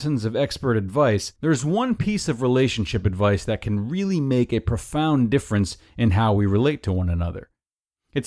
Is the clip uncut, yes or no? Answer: no